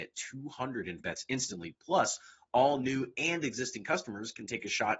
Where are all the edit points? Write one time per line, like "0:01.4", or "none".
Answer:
0:01.0